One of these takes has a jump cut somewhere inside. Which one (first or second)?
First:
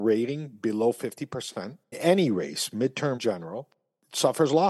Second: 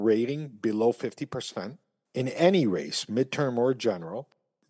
first